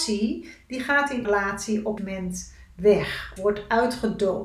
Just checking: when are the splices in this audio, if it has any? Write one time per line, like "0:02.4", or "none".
0:01.2
0:02.0
0:03.4